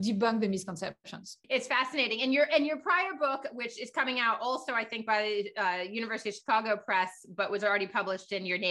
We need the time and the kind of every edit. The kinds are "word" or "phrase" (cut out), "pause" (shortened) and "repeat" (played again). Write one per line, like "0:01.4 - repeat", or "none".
0:01.4 - pause